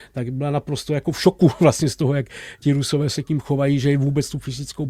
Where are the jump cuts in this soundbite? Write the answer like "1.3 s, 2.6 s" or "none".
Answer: none